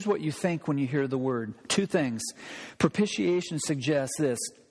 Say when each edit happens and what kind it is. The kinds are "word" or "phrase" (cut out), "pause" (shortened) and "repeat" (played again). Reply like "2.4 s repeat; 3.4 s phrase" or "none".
none